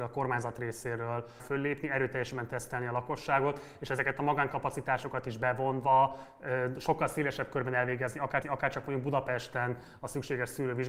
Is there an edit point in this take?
yes; 2 cuts; at 1.4 s, 8.4 s

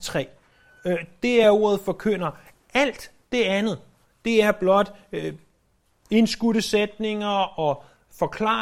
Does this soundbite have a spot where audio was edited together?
no; 0 cuts

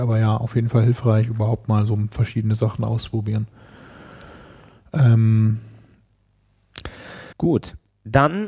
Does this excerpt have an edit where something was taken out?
yes; 1 cut; at 7.3 s

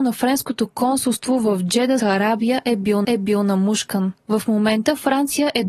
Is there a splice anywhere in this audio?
yes; 2 cuts; at 2.0 s, 3.0 s

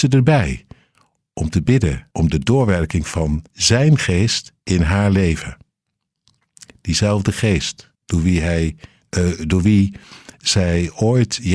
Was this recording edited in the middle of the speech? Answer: yes; 5 cuts; at 2.1 s, 3.5 s, 4.6 s, 7.9 s, 9.0 s

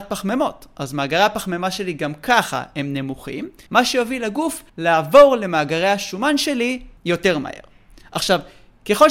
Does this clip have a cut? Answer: yes; 3 cuts; at 3.7 s, 4.7 s, 7.0 s

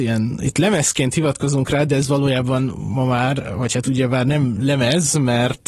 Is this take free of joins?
yes; 0 cuts

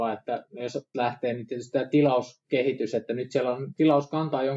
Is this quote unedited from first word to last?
no; 1 cut; at 0.9 s

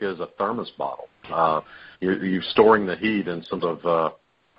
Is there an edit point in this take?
yes; 3 cuts; at 1.3 s, 1.9 s, 3.6 s

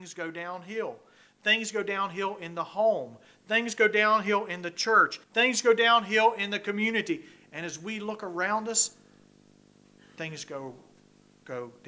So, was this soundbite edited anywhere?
yes; 1 cut; at 5.2 s

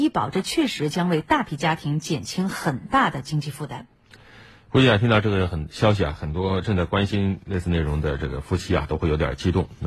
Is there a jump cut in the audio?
no; 0 cuts

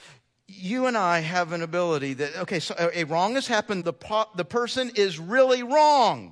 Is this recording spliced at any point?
yes; 1 cut; at 3.8 s

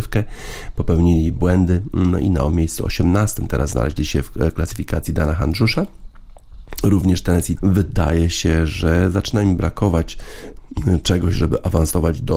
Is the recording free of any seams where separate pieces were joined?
no; 1 cut; at 7.6 s

